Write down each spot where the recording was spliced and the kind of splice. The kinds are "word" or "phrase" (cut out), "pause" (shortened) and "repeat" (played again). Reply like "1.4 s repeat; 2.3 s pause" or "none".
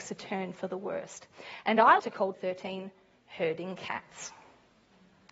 2.0 s word; 2.3 s word